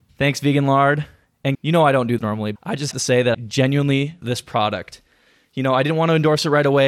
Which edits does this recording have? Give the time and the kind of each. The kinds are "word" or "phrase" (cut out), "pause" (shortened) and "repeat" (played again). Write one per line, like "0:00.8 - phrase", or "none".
0:01.5 - word
0:02.2 - word
0:02.6 - word
0:02.9 - word
0:03.3 - word
0:04.2 - word